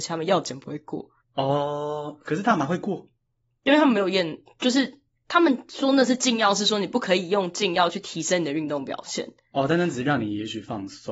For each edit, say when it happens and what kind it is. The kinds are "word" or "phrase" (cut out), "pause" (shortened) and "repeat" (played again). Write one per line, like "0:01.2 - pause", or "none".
0:01.2 - pause